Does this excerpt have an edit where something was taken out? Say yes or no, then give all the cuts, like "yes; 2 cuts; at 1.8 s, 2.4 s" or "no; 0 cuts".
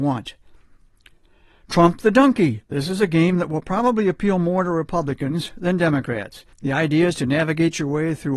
yes; 2 cuts; at 2.7 s, 6.5 s